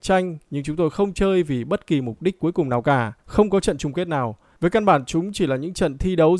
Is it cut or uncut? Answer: cut